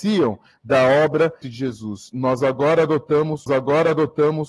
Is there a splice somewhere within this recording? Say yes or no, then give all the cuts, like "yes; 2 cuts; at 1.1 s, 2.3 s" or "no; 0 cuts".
yes; 2 cuts; at 1.4 s, 3.5 s